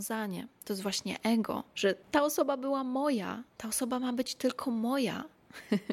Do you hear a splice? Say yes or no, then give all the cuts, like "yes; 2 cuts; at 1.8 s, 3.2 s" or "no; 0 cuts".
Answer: yes; 1 cut; at 2.0 s